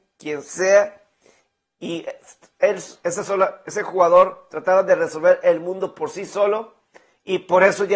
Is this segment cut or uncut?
uncut